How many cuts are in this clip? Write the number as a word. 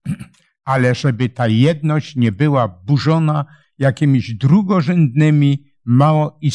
zero